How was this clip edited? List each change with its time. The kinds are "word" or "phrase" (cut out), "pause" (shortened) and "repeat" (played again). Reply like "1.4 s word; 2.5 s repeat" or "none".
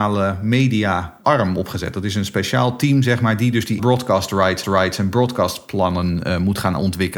1.2 s word; 3.8 s word; 4.6 s repeat